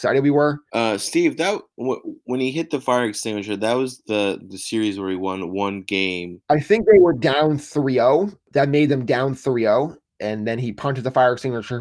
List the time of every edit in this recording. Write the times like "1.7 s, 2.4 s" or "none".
none